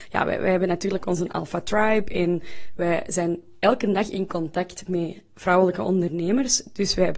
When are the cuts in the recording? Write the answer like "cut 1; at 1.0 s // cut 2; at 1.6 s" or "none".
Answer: none